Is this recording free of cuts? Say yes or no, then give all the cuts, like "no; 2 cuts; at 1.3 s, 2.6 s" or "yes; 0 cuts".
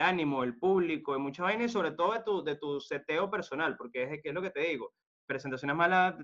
no; 1 cut; at 5.0 s